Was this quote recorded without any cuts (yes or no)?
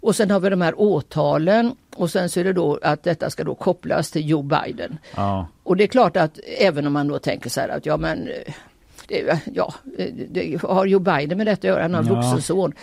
no